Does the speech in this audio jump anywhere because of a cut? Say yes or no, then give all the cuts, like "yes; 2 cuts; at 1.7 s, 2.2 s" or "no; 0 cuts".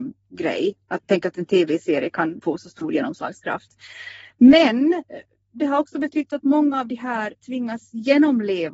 no; 0 cuts